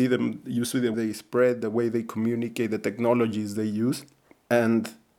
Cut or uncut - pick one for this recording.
cut